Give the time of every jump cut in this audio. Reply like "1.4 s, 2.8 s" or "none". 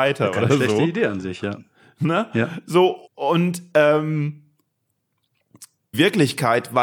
3.1 s, 5.9 s